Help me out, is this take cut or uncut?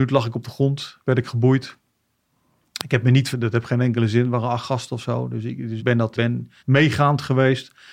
cut